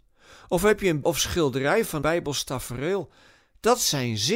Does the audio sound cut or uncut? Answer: cut